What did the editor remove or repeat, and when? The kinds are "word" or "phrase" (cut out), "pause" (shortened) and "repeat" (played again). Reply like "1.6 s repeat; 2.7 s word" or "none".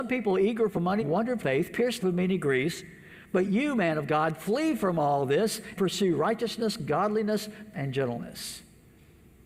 1.0 s word; 1.4 s phrase; 2.0 s word; 5.8 s word; 7.7 s phrase